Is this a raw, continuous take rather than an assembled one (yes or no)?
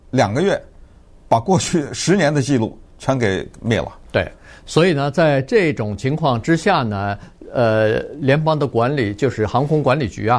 yes